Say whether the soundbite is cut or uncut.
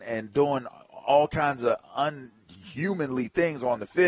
uncut